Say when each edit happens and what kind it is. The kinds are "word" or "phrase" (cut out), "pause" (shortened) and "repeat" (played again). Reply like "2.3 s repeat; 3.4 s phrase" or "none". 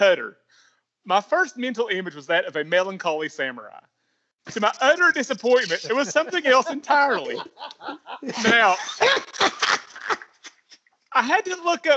none

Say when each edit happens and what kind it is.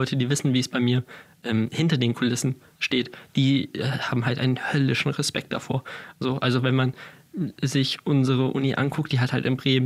none

